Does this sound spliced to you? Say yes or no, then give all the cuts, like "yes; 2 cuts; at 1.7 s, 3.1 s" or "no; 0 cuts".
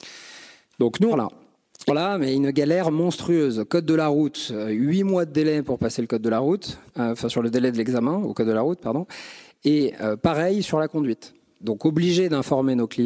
yes; 3 cuts; at 1.1 s, 1.9 s, 6.9 s